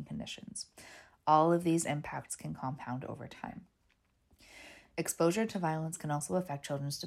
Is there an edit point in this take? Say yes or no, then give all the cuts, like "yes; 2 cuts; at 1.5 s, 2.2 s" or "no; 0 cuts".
no; 0 cuts